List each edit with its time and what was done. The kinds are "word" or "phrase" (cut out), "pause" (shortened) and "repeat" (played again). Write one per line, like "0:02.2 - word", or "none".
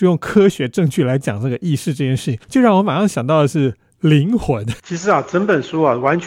0:02.4 - pause
0:04.8 - pause